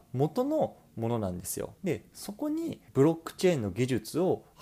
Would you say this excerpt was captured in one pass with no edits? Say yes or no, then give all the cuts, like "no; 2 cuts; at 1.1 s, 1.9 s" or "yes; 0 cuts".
no; 2 cuts; at 1.8 s, 2.9 s